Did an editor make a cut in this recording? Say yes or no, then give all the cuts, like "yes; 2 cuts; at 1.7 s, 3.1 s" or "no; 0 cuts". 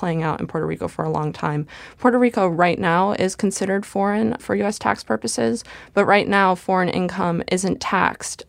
no; 0 cuts